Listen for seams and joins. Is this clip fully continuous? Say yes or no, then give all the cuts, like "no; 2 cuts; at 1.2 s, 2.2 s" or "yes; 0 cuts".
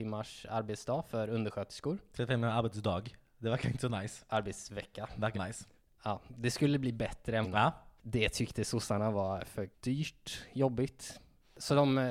no; 5 cuts; at 5.3 s, 6.3 s, 7.4 s, 8.0 s, 9.7 s